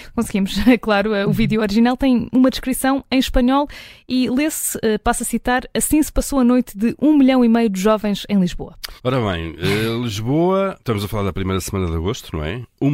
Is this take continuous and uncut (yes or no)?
no